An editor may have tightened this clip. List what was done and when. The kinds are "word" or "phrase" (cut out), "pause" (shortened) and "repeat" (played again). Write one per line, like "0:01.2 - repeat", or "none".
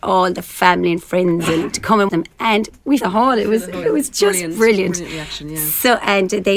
0:02.1 - word
0:03.0 - word
0:03.8 - word